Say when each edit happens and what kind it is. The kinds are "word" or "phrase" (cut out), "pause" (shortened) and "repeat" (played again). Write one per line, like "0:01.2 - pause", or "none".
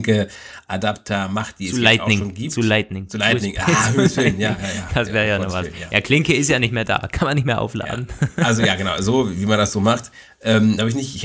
none